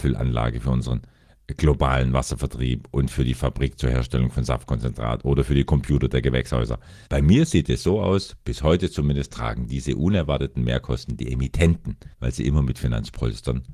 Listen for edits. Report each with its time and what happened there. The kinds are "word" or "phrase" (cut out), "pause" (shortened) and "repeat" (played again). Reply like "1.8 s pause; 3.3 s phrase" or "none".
7.1 s pause; 12.1 s pause